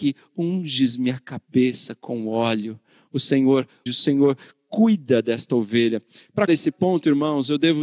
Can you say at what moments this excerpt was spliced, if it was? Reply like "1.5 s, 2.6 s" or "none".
3.9 s, 6.5 s